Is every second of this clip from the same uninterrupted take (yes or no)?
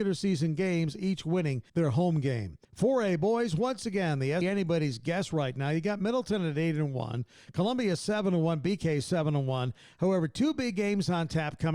no